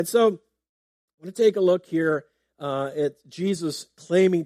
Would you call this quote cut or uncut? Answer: uncut